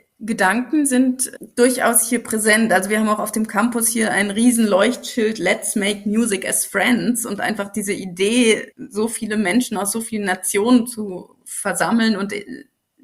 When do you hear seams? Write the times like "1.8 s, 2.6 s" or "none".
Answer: 11.3 s